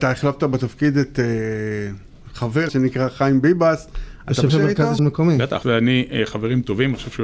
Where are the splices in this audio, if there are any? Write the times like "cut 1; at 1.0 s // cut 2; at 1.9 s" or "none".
cut 1; at 2.7 s // cut 2; at 4.5 s // cut 3; at 5.0 s // cut 4; at 5.6 s